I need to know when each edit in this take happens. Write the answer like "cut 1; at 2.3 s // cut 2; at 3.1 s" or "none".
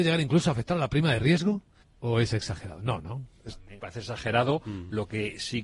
cut 1; at 1.8 s // cut 2; at 3.8 s